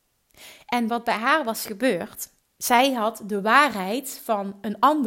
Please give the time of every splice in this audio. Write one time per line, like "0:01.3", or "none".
0:02.4